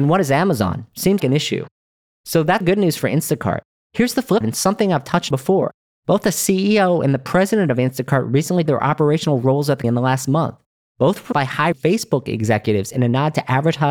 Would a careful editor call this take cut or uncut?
cut